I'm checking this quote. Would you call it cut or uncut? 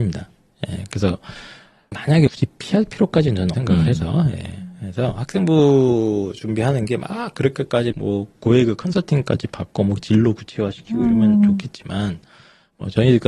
cut